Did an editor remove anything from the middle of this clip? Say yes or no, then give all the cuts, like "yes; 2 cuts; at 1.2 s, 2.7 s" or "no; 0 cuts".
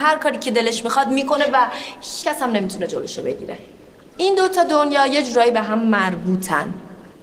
yes; 1 cut; at 2.2 s